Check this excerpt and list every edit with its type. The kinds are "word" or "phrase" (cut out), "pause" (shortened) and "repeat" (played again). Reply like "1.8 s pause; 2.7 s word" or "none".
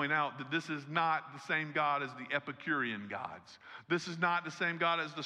none